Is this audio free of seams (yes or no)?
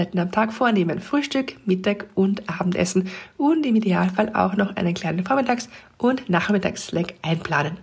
yes